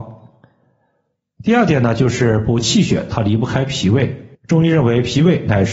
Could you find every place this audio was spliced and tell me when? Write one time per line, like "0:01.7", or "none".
0:04.3